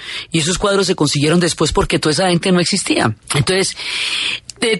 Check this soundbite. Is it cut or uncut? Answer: cut